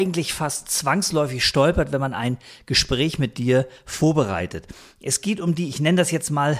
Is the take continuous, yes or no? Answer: yes